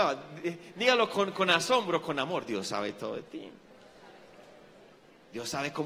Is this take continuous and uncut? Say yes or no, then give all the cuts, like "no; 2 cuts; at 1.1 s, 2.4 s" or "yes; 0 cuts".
yes; 0 cuts